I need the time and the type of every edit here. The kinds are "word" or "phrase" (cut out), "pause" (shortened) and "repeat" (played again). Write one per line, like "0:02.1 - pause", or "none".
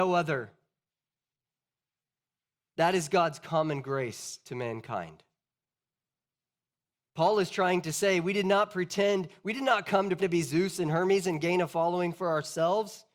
0:10.2 - word